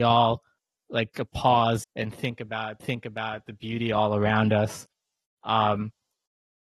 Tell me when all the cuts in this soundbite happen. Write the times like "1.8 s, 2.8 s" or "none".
1.1 s, 1.8 s, 2.8 s